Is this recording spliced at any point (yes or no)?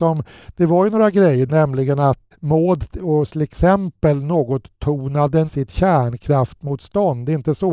yes